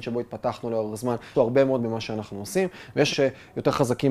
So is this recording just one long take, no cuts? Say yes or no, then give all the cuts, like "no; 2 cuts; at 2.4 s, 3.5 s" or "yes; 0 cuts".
no; 3 cuts; at 1.3 s, 1.8 s, 3.1 s